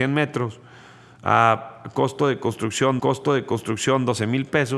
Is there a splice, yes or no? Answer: yes